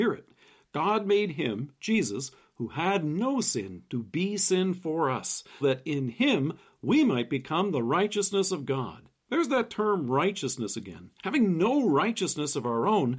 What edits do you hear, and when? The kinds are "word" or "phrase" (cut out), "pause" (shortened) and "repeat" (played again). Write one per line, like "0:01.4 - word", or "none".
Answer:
0:05.6 - word
0:09.2 - pause
0:11.2 - pause